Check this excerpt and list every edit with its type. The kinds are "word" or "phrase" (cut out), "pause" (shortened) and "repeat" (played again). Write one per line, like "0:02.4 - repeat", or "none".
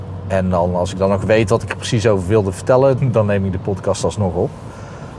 0:03.0 - word